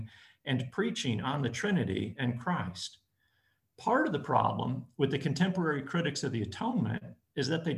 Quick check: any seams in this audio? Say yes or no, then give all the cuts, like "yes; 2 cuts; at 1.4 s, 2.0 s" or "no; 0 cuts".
no; 0 cuts